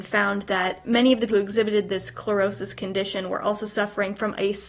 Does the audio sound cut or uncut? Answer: cut